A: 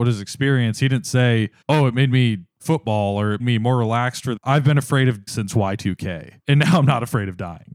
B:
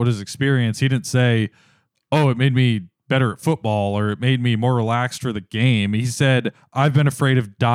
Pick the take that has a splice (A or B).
A